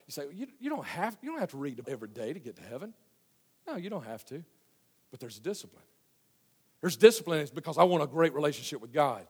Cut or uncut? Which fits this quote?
cut